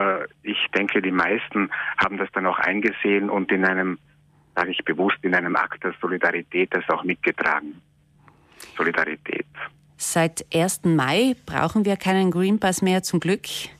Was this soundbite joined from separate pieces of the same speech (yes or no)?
no